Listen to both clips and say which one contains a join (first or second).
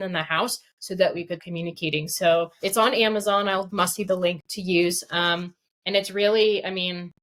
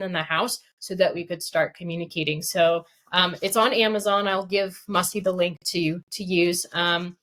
first